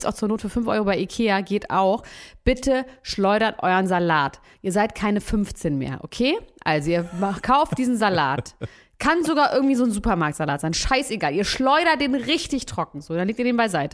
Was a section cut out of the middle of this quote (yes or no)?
no